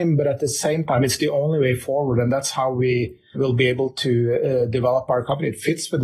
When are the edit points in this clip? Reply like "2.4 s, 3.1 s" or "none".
3.3 s